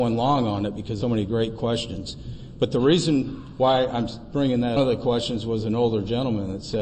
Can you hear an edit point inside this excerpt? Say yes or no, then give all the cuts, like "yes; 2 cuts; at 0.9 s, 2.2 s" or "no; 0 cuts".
yes; 2 cuts; at 1.0 s, 4.8 s